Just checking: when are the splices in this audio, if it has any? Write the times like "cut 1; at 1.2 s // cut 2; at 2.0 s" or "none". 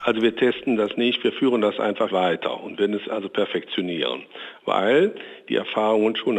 cut 1; at 2.1 s